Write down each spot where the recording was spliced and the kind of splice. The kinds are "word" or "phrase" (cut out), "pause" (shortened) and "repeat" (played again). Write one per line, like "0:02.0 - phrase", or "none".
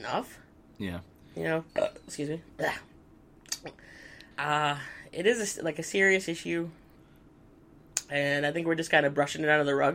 0:01.1 - pause
0:01.7 - pause
0:04.3 - pause